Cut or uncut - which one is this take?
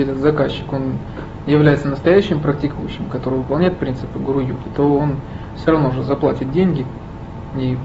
uncut